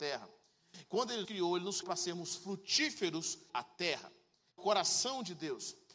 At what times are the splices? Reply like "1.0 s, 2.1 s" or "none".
1.2 s, 1.8 s, 3.5 s, 4.6 s